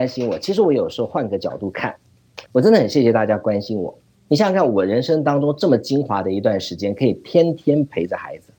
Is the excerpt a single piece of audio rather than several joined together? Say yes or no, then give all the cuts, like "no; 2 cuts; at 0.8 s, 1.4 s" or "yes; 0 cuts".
no; 2 cuts; at 2.5 s, 4.0 s